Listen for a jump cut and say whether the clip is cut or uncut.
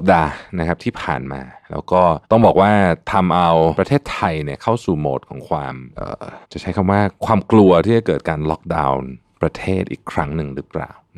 cut